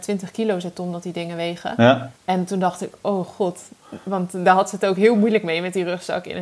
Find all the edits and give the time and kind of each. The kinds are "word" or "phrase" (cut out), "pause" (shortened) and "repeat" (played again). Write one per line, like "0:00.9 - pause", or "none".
0:02.2 - pause